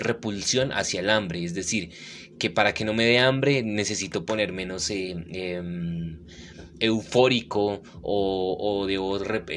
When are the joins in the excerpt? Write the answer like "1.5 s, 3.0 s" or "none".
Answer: none